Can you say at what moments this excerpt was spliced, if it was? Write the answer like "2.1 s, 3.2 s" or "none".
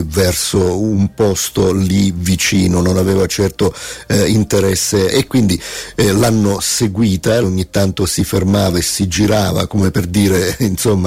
5.1 s, 7.4 s